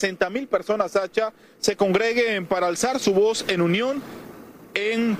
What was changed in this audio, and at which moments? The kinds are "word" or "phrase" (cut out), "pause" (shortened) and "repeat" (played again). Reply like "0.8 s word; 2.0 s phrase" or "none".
none